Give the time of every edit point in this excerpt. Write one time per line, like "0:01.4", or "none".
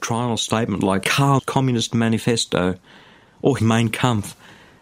0:01.4
0:03.6